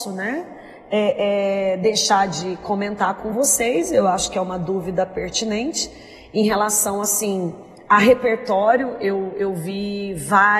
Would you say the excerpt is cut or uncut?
uncut